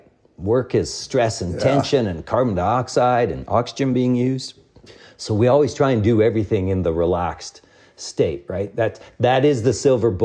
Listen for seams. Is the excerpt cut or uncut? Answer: uncut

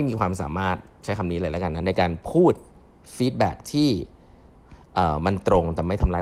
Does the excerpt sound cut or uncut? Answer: uncut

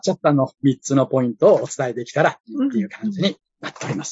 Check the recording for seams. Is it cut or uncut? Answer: cut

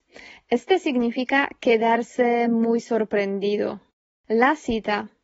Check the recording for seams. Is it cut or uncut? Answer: uncut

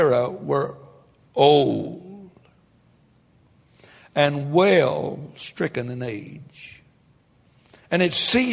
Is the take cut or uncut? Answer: uncut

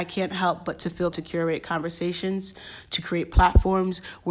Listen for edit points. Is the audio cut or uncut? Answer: cut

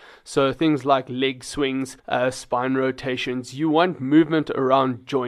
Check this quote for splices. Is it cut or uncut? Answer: cut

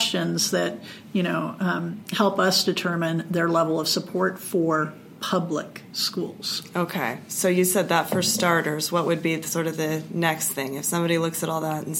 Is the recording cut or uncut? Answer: uncut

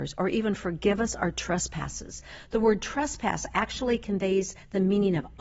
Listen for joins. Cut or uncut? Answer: uncut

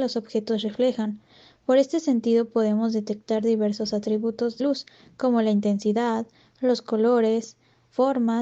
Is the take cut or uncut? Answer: cut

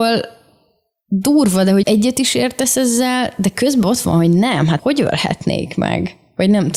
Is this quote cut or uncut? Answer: cut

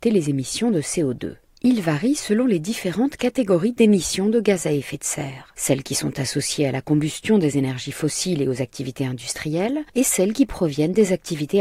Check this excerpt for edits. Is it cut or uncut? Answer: uncut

